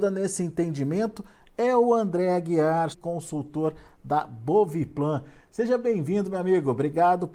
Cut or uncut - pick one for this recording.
cut